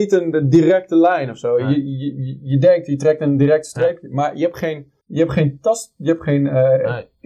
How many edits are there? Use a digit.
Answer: 1